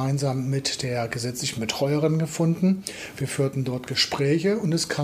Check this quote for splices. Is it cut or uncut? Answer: uncut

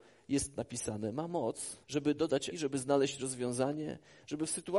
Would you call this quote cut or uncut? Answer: cut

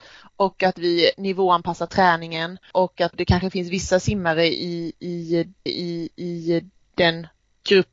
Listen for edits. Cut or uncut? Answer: cut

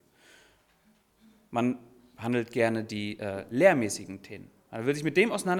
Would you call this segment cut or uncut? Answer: uncut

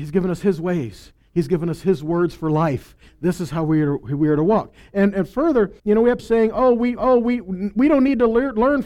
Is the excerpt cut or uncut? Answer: cut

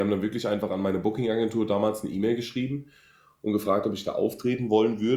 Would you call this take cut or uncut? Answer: uncut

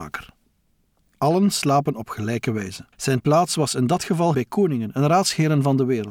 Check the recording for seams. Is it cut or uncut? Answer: cut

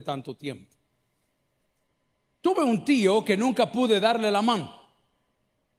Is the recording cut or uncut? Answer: uncut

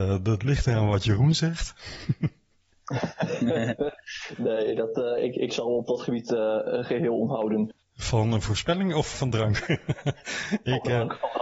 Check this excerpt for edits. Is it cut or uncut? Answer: cut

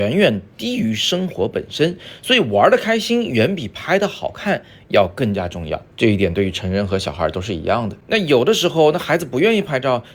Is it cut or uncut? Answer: cut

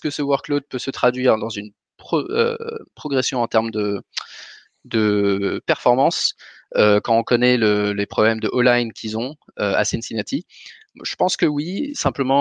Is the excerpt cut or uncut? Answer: uncut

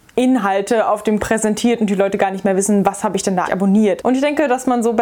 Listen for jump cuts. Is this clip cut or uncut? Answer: cut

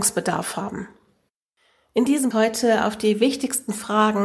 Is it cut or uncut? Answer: cut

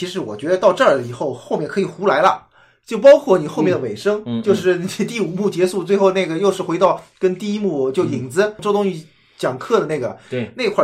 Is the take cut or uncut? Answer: uncut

